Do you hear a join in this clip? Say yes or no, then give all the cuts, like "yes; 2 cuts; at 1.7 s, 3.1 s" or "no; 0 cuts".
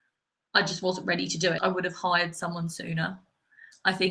yes; 1 cut; at 1.6 s